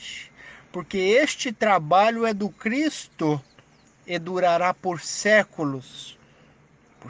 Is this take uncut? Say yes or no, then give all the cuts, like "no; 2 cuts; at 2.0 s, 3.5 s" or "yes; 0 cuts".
yes; 0 cuts